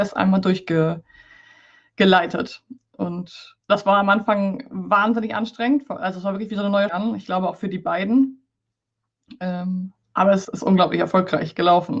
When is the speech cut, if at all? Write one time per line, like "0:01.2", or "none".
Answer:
0:03.6
0:06.9
0:10.4